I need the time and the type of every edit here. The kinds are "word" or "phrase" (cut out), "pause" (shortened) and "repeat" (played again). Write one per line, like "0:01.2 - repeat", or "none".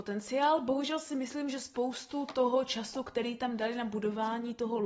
none